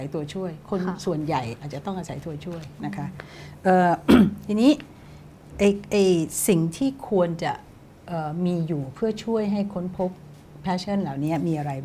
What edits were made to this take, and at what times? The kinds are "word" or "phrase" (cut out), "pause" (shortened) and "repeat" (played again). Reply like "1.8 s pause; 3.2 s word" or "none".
none